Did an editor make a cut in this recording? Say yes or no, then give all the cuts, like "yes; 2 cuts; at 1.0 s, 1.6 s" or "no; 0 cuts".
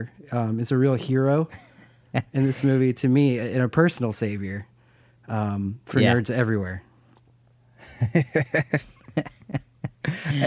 no; 0 cuts